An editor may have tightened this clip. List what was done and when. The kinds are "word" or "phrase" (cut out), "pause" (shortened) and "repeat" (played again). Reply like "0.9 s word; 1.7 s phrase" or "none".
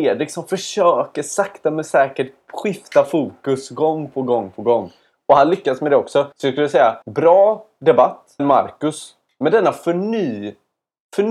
6.3 s pause; 7.0 s pause; 8.4 s word